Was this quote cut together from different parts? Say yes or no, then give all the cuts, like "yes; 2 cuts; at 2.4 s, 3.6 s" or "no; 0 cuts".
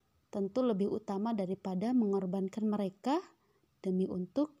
no; 0 cuts